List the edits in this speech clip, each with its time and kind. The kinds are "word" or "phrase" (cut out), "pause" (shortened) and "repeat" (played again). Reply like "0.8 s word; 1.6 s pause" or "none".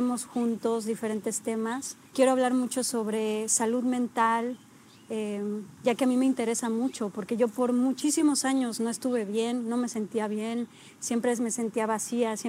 2.1 s pause